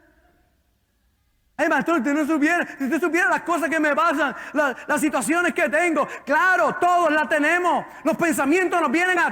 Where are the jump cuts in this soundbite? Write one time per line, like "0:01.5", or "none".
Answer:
none